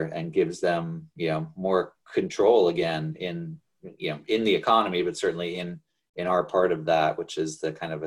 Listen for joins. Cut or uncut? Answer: uncut